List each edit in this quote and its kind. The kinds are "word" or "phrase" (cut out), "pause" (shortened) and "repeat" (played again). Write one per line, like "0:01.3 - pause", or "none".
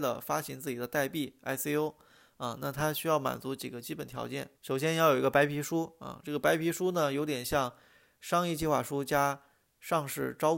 0:04.6 - pause

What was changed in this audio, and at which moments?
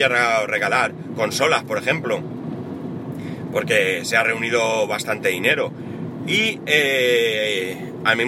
none

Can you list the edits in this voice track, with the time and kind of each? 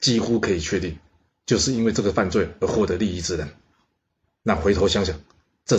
none

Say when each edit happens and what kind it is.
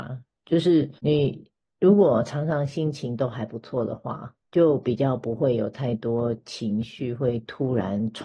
0:01.0 - pause
0:04.4 - pause

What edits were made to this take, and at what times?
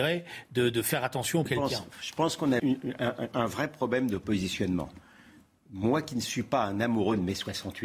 0:01.5 - word
0:02.6 - word
0:03.3 - word

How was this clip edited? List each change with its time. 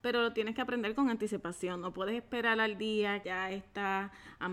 0:03.2 - word

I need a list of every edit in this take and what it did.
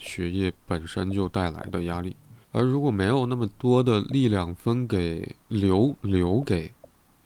0:02.4 - pause

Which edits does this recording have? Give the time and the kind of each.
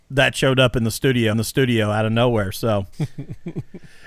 0:01.3 - repeat
0:02.9 - pause

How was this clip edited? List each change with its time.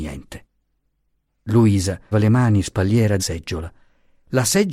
0:02.1 - word
0:02.6 - word
0:03.2 - word

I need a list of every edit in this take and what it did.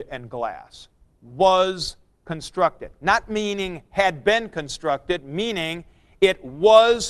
none

